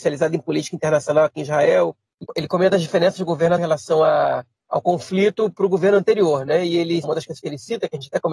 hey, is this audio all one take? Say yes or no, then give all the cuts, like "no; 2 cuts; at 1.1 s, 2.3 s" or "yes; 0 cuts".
no; 3 cuts; at 2.2 s, 3.6 s, 7.0 s